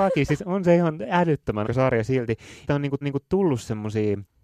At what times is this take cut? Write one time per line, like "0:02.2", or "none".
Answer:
0:01.6
0:02.7
0:03.0